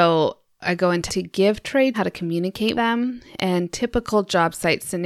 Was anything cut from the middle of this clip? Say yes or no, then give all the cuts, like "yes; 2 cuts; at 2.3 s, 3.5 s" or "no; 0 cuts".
yes; 3 cuts; at 1.1 s, 1.9 s, 2.7 s